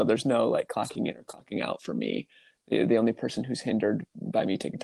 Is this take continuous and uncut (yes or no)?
yes